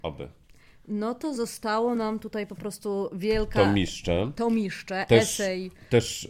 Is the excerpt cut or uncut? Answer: uncut